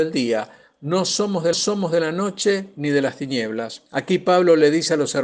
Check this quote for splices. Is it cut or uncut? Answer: cut